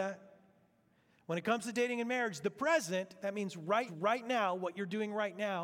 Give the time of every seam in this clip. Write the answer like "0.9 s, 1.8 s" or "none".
3.9 s